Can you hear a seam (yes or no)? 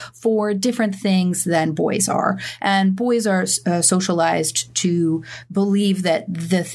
no